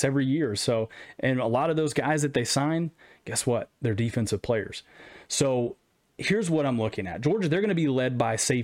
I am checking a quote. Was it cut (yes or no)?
no